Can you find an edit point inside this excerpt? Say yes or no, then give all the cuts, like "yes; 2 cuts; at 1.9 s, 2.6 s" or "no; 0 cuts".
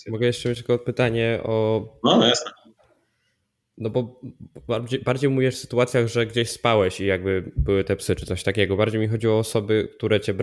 no; 0 cuts